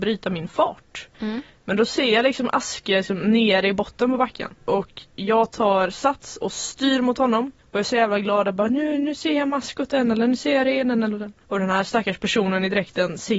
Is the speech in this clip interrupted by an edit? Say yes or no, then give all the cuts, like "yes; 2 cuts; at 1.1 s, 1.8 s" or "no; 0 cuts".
yes; 4 cuts; at 1.1 s, 4.6 s, 7.6 s, 11.4 s